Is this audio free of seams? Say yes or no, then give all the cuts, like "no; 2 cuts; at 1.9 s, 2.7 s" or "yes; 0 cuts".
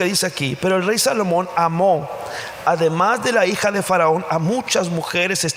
yes; 0 cuts